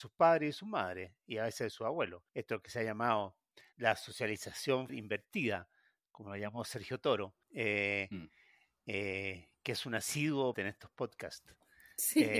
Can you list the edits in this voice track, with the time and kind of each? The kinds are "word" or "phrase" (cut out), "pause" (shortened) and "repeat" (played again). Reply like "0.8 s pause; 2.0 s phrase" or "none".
2.3 s pause; 3.7 s word; 4.9 s word; 7.4 s pause; 10.5 s word